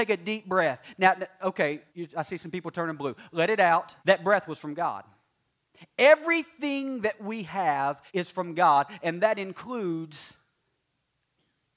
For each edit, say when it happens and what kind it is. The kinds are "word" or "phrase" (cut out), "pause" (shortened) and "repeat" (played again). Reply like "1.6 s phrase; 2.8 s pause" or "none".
1.9 s pause; 4.0 s pause; 8.1 s pause